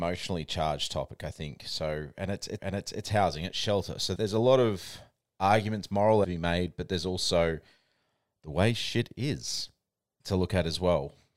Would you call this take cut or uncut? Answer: cut